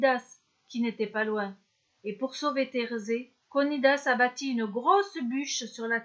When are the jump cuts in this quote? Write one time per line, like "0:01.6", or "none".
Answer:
0:03.4